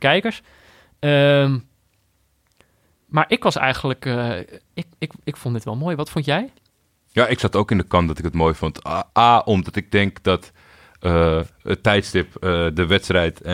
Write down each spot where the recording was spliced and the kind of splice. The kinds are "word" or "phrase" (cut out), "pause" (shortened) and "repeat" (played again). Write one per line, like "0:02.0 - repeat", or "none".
0:09.1 - pause